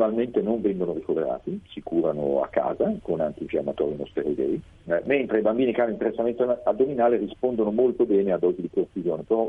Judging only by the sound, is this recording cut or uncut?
uncut